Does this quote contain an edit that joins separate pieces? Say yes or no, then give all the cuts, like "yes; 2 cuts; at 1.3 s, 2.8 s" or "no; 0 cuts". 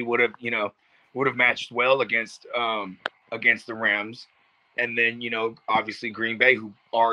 yes; 1 cut; at 3.2 s